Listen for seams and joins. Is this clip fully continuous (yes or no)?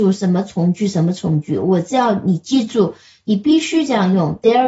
yes